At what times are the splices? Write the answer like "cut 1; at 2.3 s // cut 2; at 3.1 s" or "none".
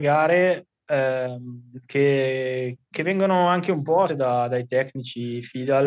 cut 1; at 2.8 s // cut 2; at 4.1 s

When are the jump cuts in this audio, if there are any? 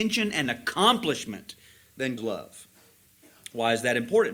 cut 1; at 2.2 s

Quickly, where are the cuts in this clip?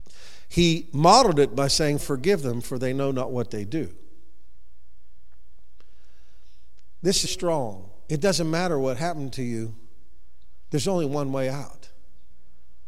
cut 1; at 2.0 s // cut 2; at 7.3 s

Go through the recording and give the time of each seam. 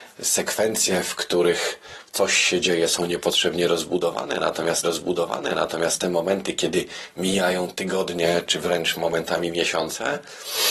cut 1; at 4.8 s

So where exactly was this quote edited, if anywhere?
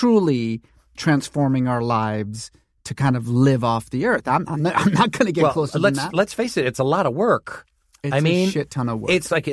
none

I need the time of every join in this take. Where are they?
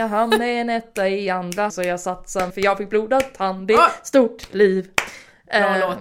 cut 1; at 1.7 s // cut 2; at 2.5 s

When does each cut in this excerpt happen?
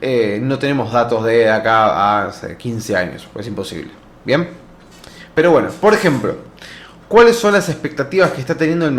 none

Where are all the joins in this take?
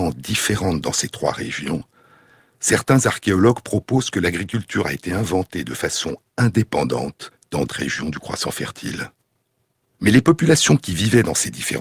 cut 1; at 7.7 s

